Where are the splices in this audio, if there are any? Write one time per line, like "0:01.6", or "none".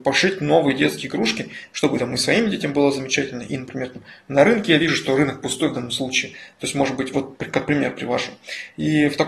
none